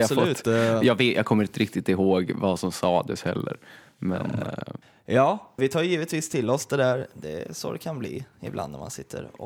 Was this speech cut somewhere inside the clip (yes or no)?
yes